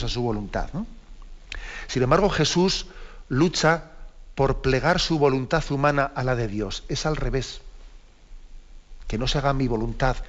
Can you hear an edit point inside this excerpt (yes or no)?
no